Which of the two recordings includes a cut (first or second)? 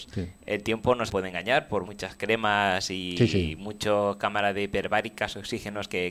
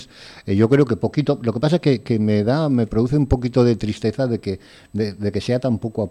first